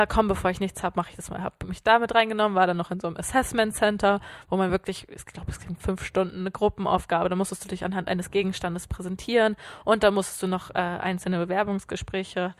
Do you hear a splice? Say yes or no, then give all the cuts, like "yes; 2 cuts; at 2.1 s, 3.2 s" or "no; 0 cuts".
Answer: no; 0 cuts